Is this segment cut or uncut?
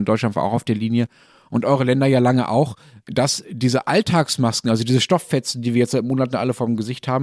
uncut